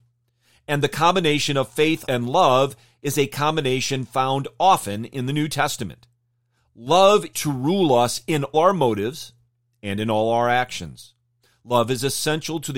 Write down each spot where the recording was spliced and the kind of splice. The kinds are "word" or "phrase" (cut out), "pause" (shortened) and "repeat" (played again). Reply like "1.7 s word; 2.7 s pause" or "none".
2.1 s word; 7.3 s word; 8.5 s word